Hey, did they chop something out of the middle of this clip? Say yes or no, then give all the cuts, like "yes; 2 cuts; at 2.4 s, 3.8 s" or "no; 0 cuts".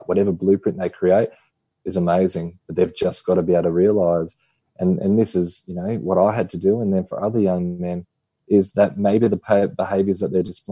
no; 0 cuts